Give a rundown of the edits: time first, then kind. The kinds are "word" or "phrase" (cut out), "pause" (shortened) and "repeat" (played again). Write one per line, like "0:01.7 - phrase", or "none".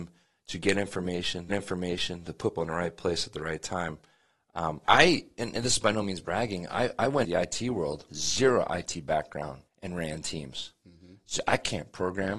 0:01.5 - repeat
0:02.6 - word
0:04.8 - word
0:07.2 - word
0:08.1 - word
0:09.7 - pause